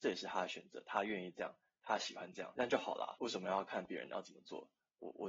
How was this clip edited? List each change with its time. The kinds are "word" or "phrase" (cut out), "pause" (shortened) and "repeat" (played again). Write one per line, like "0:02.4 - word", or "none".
none